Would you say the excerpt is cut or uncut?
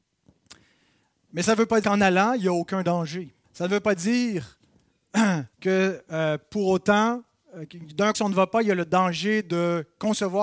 cut